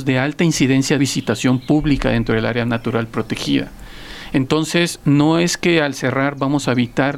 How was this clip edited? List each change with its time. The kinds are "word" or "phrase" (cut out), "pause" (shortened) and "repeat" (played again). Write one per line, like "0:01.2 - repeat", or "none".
0:01.0 - phrase